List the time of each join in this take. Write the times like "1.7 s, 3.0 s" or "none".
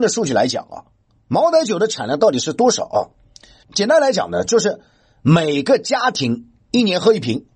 none

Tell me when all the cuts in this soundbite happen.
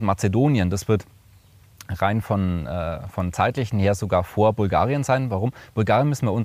none

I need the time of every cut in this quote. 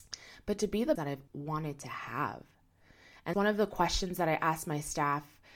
1.0 s, 1.3 s, 3.3 s

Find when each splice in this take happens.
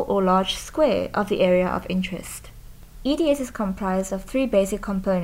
none

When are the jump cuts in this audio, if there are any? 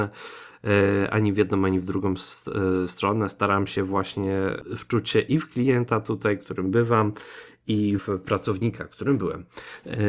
8.0 s

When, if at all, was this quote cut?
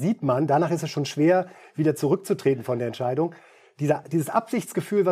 none

